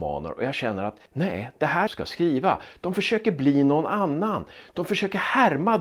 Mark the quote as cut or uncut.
cut